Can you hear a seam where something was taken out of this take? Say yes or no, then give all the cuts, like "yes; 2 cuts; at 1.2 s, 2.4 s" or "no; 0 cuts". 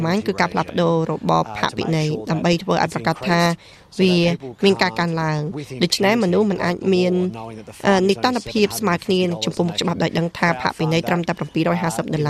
no; 0 cuts